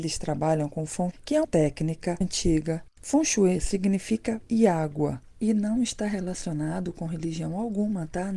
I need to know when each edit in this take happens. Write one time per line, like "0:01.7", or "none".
0:01.1
0:01.4
0:02.2
0:04.5